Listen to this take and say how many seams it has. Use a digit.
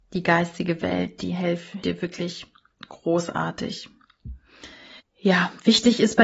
2